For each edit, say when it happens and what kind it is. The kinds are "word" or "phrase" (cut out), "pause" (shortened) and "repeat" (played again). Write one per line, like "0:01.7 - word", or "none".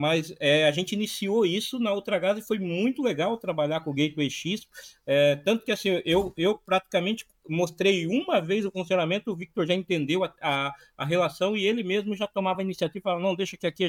none